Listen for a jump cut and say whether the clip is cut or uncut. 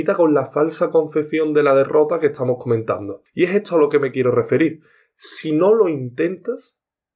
uncut